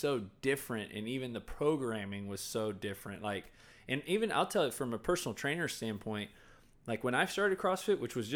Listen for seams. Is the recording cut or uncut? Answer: uncut